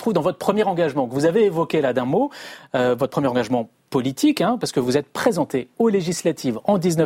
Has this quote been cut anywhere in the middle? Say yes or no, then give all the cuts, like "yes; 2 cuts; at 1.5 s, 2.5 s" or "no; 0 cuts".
no; 0 cuts